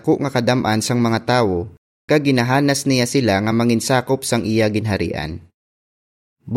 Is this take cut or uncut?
uncut